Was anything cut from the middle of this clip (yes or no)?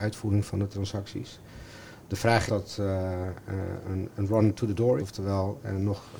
yes